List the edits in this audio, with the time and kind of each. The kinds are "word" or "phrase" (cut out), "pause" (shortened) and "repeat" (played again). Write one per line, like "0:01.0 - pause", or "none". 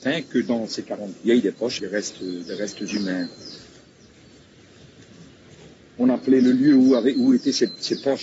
0:01.1 - word
0:01.8 - word